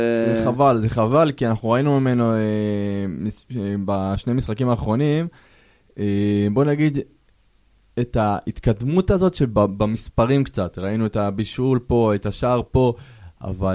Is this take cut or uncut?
uncut